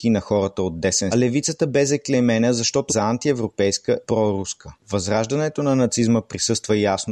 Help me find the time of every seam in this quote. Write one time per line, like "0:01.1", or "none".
0:01.1
0:02.9
0:04.0
0:04.8